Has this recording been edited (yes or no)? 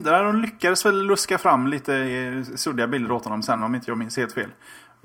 no